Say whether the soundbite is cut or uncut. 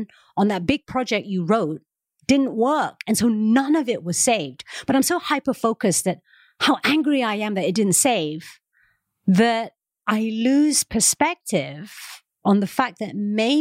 uncut